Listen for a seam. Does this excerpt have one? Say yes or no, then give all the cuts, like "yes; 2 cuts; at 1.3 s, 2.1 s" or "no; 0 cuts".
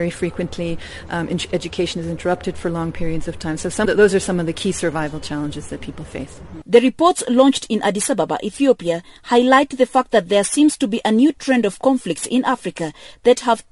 yes; 1 cut; at 3.9 s